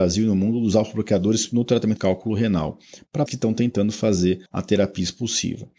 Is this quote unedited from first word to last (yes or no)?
no